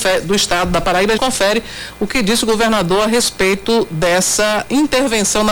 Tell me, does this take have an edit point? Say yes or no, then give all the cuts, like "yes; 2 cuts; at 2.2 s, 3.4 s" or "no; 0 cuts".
yes; 1 cut; at 1.2 s